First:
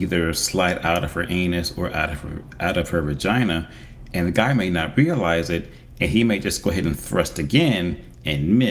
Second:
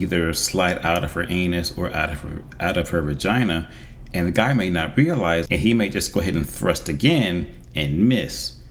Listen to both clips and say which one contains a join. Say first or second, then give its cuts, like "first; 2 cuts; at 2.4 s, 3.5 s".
second; 1 cut; at 5.5 s